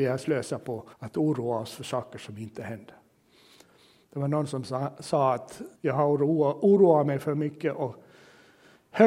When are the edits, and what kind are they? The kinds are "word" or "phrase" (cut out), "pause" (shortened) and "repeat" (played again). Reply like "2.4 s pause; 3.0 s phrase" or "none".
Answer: 0.9 s pause; 5.8 s pause